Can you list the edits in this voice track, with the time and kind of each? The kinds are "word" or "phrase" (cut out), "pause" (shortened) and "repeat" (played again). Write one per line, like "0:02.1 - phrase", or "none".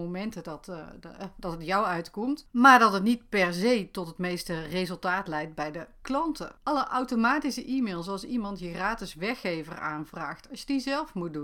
0:06.6 - pause